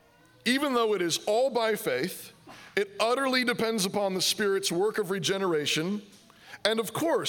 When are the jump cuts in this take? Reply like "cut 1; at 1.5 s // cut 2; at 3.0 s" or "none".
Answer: none